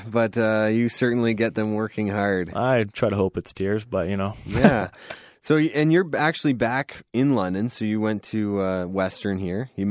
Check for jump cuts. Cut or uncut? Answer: uncut